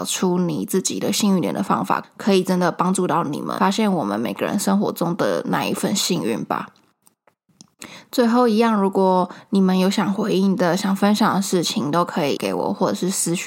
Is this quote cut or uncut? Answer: cut